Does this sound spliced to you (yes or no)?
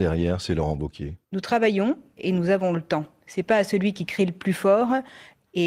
yes